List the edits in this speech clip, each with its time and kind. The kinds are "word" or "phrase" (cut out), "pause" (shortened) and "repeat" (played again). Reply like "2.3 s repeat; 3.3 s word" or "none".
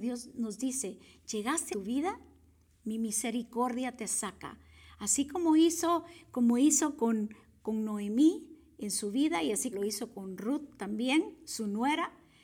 1.7 s phrase; 9.7 s word